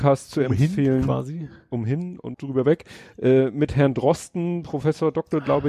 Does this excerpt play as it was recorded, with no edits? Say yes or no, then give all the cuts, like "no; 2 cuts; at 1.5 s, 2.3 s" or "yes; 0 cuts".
no; 1 cut; at 2.3 s